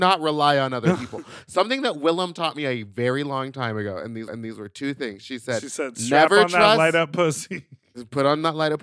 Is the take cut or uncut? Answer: cut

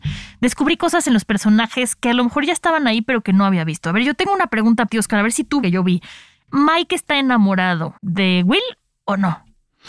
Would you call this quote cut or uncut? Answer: cut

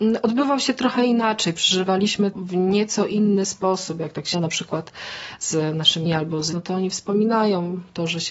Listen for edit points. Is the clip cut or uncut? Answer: cut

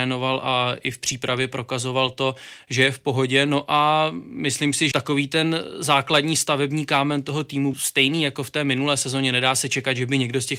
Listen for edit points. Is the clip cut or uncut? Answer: cut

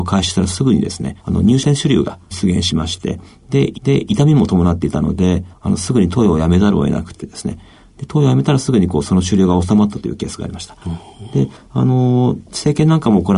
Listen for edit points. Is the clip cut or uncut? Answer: cut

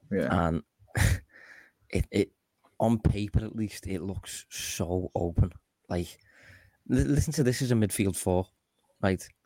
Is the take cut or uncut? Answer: uncut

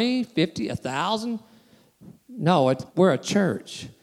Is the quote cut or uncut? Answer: cut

